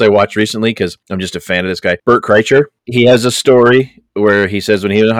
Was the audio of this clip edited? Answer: yes; 1 cut; at 4.1 s

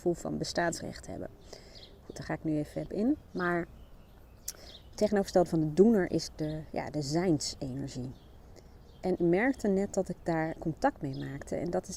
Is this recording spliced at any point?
yes; 4 cuts; at 2.9 s, 4.9 s, 9.2 s, 10.6 s

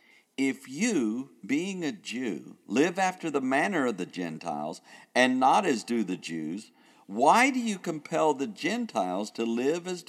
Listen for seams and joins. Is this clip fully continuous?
yes; 0 cuts

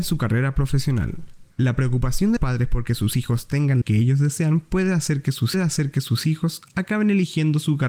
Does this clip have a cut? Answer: yes; 4 cuts; at 1.5 s, 2.4 s, 3.8 s, 5.5 s

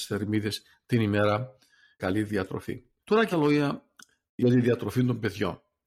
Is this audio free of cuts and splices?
no; 3 cuts; at 2.0 s, 3.0 s, 3.3 s

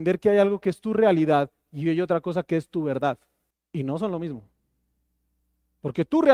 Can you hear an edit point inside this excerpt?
yes; 1 cut; at 3.5 s

